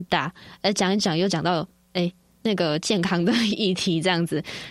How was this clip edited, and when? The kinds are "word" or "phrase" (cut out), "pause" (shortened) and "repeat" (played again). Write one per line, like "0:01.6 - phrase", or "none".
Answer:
none